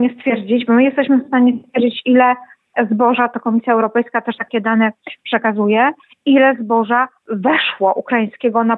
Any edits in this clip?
no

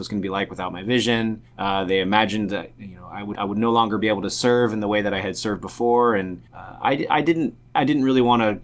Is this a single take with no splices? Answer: no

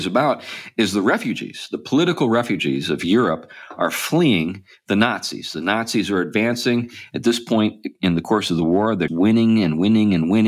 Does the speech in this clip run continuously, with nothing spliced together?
no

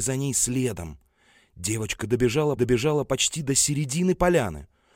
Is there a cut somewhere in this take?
yes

